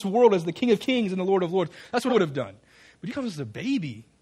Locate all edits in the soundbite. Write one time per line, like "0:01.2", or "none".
0:02.1
0:03.1